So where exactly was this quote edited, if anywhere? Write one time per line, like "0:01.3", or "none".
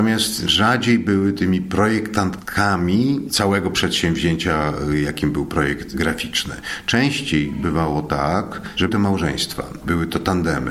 0:08.9